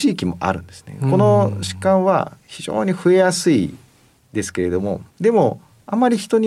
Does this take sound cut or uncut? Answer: cut